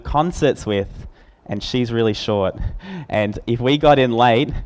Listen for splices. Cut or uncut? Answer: uncut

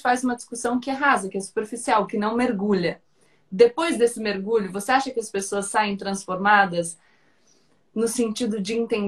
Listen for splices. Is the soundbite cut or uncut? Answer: uncut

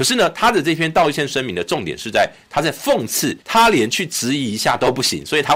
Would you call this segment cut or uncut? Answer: cut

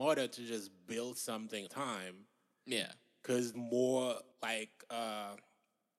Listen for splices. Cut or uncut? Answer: cut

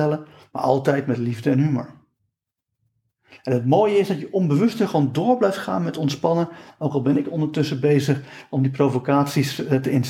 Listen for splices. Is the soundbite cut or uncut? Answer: uncut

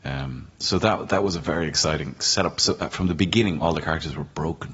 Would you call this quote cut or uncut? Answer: uncut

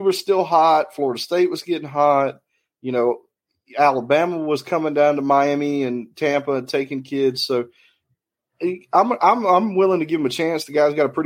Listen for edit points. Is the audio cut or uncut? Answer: uncut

